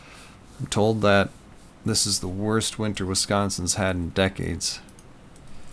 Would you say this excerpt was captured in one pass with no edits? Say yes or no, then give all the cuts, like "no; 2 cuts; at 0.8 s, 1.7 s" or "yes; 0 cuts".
yes; 0 cuts